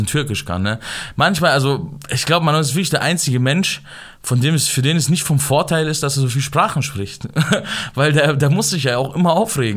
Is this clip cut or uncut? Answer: uncut